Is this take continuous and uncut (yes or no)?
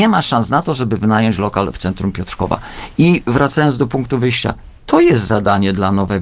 yes